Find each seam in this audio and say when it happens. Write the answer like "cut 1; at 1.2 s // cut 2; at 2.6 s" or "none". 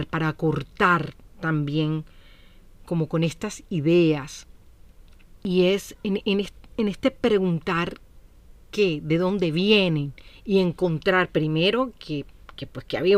none